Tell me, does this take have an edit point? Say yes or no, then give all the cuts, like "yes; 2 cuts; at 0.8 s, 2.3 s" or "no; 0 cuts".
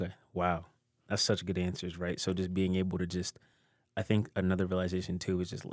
no; 0 cuts